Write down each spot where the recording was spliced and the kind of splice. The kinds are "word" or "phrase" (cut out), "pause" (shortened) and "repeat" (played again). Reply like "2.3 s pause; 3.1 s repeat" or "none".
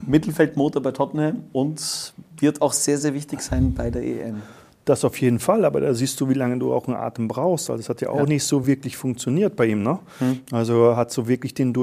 none

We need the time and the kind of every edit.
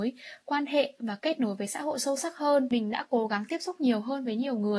none

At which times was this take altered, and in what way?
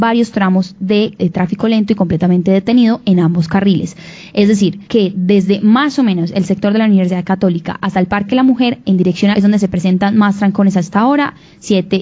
4.9 s pause; 9.3 s phrase

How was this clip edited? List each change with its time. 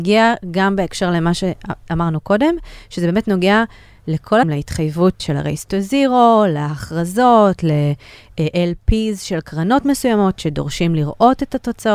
4.4 s word; 5.2 s word

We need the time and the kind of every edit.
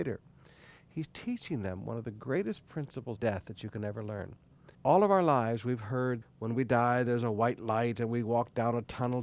3.2 s word; 4.7 s pause; 6.2 s word

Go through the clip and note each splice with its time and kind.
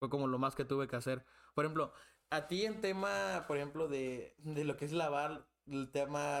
none

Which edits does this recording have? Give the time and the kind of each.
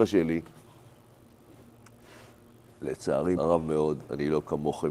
3.4 s word

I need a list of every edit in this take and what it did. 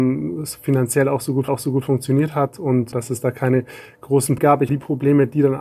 1.5 s repeat; 2.9 s word; 4.4 s word; 4.7 s word

